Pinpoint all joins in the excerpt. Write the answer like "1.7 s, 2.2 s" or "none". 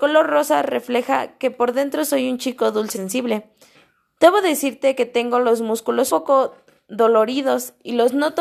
2.9 s, 3.7 s, 6.1 s